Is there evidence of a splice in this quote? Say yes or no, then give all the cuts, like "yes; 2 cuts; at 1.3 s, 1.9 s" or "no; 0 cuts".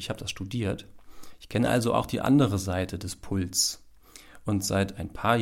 no; 0 cuts